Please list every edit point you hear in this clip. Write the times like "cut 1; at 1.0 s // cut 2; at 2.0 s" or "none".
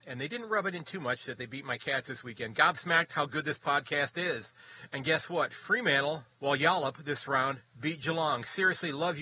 cut 1; at 6.3 s